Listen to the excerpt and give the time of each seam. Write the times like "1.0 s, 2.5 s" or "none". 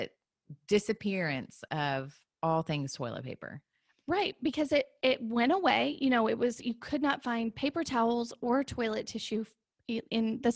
none

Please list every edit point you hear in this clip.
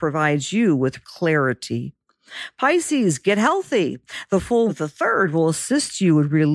1.0 s, 4.7 s

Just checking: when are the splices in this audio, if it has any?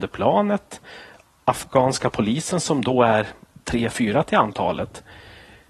none

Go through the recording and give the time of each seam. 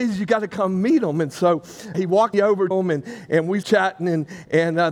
1.9 s, 2.3 s, 2.7 s, 3.6 s

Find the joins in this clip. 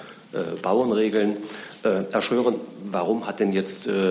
none

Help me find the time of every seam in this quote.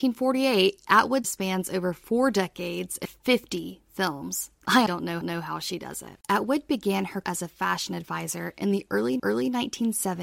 1.2 s, 3.1 s, 4.9 s, 5.2 s, 6.2 s, 7.2 s, 9.2 s

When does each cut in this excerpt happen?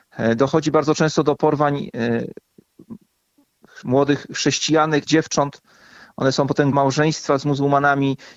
5.1 s, 6.7 s

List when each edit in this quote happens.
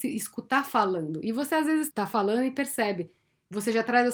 1.9 s

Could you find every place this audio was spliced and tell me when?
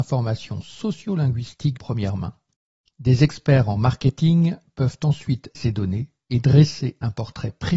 1.8 s, 5.5 s

